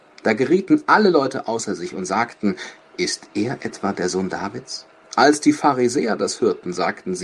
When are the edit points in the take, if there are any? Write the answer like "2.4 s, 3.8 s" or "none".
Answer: none